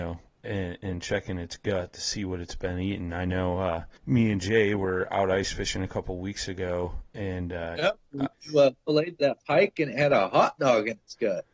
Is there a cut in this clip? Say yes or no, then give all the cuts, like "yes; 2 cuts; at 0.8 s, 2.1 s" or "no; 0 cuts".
yes; 3 cuts; at 4.0 s, 8.3 s, 9.4 s